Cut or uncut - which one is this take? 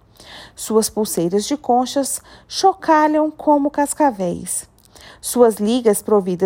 uncut